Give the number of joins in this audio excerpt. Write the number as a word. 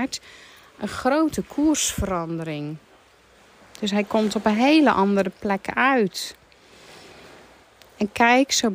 zero